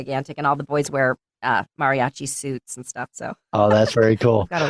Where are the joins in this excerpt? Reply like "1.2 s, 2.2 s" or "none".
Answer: none